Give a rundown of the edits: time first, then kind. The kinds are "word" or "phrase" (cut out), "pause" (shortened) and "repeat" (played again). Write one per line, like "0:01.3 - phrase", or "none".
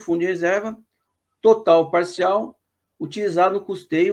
none